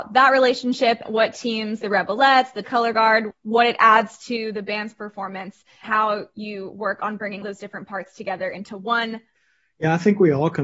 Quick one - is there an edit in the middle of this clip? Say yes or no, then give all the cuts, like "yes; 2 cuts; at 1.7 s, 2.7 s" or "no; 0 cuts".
yes; 5 cuts; at 1.1 s, 1.8 s, 2.6 s, 5.8 s, 7.4 s